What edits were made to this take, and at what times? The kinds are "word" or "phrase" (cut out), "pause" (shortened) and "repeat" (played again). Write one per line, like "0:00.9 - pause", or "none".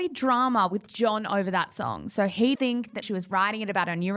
0:02.6 - word
0:03.0 - word